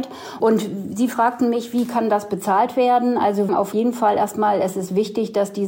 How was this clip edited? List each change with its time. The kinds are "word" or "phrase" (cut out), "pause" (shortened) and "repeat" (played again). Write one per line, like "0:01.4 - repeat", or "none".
0:03.5 - phrase